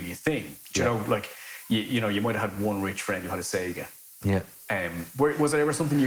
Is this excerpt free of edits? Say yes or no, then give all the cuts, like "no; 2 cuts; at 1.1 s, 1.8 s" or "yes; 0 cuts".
yes; 0 cuts